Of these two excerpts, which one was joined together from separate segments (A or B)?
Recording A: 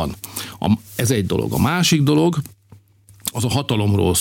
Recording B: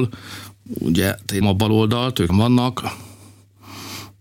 B